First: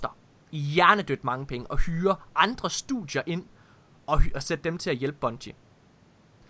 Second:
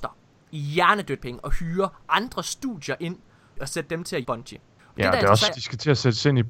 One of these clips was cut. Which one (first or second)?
second